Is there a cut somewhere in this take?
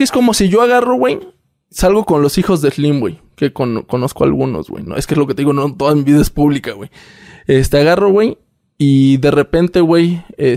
no; 0 cuts

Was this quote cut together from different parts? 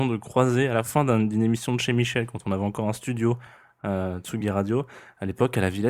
no; 0 cuts

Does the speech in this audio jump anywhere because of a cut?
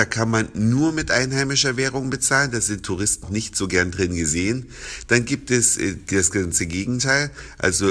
yes; 1 cut; at 3.2 s

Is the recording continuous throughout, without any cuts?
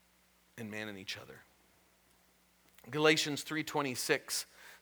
yes; 0 cuts

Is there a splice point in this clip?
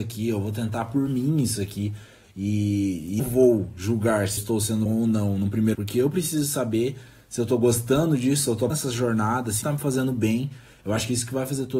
yes; 6 cuts; at 3.2 s, 4.4 s, 4.9 s, 5.7 s, 8.7 s, 9.6 s

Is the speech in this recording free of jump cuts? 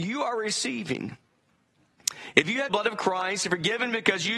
no; 1 cut; at 2.7 s

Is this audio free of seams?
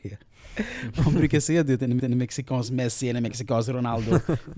no; 1 cut; at 2.0 s

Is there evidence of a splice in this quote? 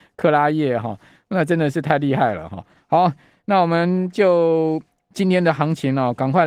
no; 0 cuts

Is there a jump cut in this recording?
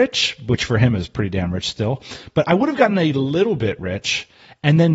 no; 0 cuts

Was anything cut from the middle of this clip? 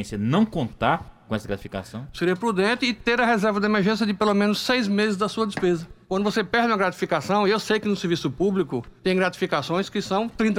yes; 2 cuts; at 6.0 s, 9.0 s

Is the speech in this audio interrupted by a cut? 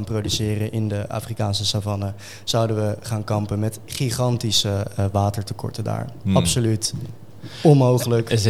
no; 0 cuts

